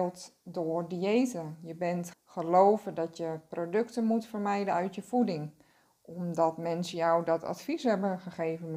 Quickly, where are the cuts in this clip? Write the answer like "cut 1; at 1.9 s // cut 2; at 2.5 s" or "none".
cut 1; at 2.1 s